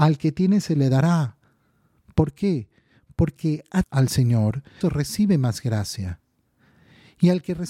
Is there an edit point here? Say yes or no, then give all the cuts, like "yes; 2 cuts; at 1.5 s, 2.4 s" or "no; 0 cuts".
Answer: yes; 3 cuts; at 3.4 s, 3.8 s, 4.8 s